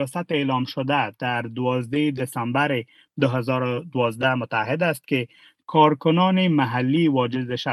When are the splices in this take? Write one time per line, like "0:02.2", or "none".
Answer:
none